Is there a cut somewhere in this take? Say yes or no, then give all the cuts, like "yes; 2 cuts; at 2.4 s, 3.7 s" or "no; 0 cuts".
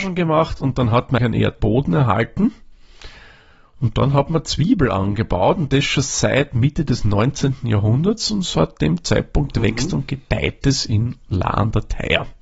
yes; 2 cuts; at 1.2 s, 1.6 s